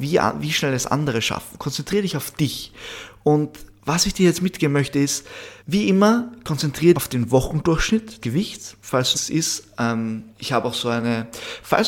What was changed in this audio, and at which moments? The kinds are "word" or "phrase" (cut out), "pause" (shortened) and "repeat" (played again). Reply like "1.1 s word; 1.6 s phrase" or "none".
5.6 s pause; 6.9 s word; 8.2 s word; 9.1 s phrase; 10.3 s pause